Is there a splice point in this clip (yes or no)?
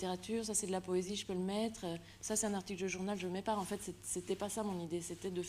no